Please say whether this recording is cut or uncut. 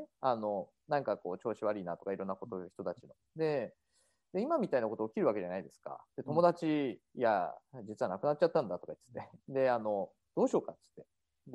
cut